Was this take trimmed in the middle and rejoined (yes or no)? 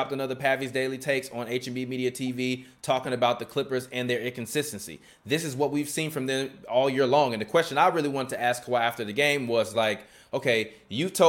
no